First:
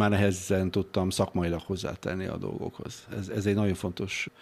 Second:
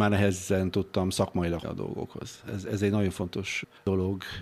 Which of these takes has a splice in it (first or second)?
second